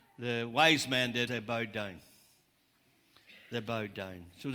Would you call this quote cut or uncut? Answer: cut